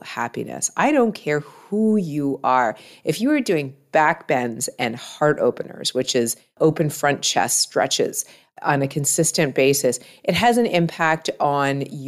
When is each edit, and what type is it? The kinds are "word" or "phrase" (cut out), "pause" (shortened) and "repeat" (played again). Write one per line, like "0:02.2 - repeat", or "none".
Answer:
none